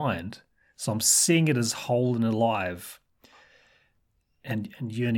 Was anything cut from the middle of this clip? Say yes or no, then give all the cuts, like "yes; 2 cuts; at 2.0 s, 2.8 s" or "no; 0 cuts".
no; 0 cuts